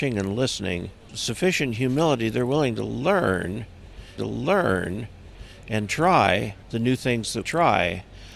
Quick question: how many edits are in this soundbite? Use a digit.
4